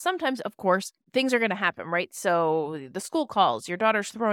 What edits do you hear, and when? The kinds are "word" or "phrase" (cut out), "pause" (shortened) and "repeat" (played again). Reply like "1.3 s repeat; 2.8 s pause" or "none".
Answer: none